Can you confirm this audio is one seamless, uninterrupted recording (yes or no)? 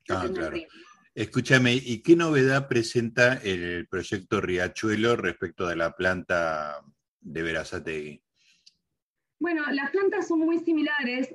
yes